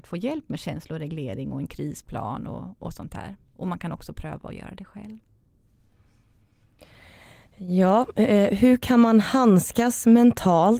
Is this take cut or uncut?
uncut